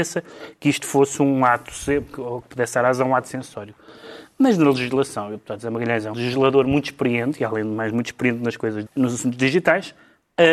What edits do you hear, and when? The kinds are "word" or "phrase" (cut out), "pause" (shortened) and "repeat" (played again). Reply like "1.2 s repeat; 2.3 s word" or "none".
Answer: 6.1 s word; 8.9 s word